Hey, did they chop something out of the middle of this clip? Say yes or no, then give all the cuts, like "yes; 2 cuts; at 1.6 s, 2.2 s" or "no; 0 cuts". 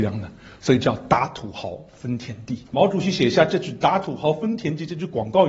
yes; 1 cut; at 2.7 s